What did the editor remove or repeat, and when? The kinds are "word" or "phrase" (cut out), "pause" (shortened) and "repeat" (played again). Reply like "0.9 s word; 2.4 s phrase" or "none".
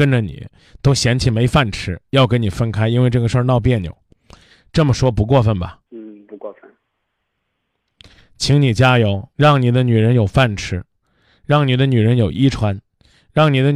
5.9 s pause; 9.3 s pause